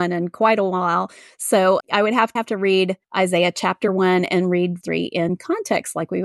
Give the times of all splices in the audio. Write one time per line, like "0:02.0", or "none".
0:01.8
0:02.4
0:03.0
0:04.8